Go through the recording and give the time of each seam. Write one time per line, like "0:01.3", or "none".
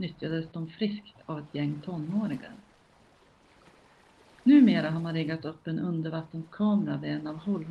none